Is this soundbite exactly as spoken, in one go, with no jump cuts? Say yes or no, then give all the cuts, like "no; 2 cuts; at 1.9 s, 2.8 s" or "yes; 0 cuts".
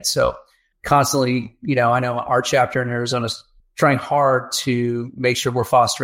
yes; 0 cuts